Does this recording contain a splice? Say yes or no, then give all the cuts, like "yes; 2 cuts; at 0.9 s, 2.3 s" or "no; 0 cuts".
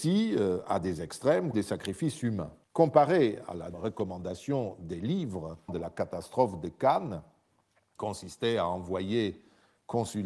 yes; 5 cuts; at 1.5 s, 2.6 s, 3.7 s, 5.7 s, 8.0 s